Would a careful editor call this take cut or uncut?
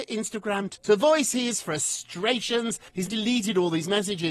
cut